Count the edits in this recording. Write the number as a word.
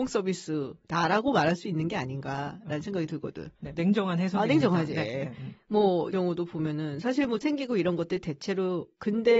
three